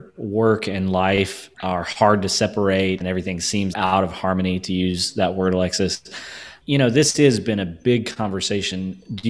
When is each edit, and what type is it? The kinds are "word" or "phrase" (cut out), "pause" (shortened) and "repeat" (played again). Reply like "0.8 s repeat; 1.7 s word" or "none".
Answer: 1.5 s pause; 3.0 s word; 3.7 s phrase; 6.6 s word